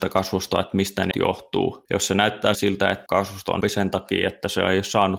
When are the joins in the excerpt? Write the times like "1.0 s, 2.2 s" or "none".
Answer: 1.1 s, 2.5 s, 3.1 s, 3.6 s